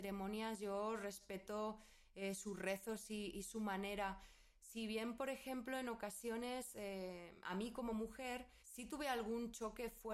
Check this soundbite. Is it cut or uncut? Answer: cut